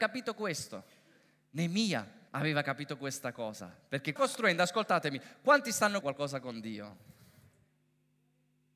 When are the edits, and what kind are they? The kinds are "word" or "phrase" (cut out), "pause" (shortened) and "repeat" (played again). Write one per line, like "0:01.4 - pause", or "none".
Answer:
0:02.3 - pause
0:04.2 - phrase
0:06.0 - word